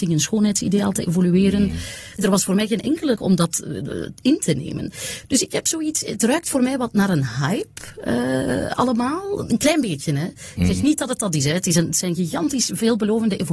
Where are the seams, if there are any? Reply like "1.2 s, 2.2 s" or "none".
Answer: 3.1 s